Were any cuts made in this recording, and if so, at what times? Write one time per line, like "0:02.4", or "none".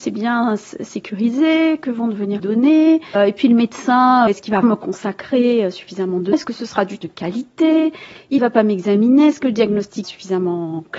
0:02.4
0:03.1
0:04.3
0:04.6
0:06.3
0:07.0
0:08.4
0:10.0